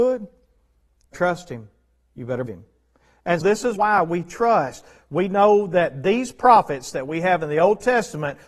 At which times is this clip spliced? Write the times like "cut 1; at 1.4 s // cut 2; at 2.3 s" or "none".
cut 1; at 1.1 s // cut 2; at 2.5 s // cut 3; at 3.4 s // cut 4; at 3.8 s